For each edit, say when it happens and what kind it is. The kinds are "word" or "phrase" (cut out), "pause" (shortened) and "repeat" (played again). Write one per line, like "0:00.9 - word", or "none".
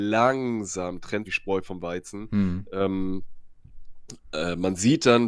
0:01.2 - phrase